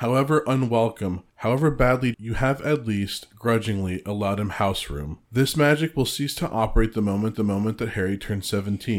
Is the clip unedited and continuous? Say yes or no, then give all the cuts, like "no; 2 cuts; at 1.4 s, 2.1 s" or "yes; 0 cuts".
no; 4 cuts; at 1.3 s, 2.1 s, 5.2 s, 7.3 s